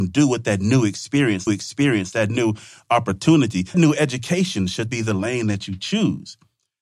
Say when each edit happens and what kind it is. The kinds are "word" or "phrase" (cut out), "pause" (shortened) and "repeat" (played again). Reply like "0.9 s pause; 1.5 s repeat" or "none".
1.5 s repeat; 3.7 s word; 4.9 s word